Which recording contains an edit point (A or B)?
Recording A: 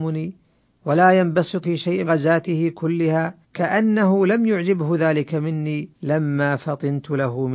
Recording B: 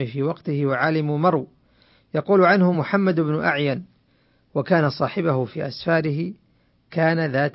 A